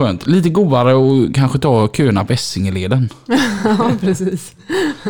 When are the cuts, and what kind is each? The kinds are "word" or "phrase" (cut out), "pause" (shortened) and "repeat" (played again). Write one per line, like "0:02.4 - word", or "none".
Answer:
none